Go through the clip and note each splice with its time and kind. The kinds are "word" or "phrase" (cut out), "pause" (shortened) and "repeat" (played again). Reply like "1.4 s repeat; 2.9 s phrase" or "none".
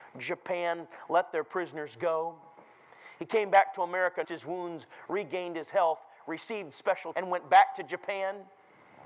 4.2 s word; 7.1 s word